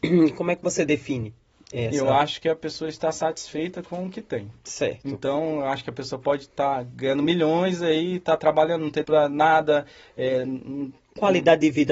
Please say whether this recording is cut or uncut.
cut